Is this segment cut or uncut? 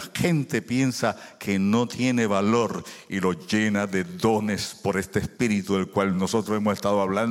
uncut